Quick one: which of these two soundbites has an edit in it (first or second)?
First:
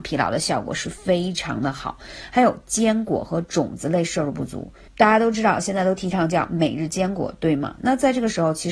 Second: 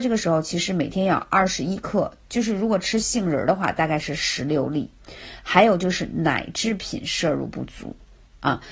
first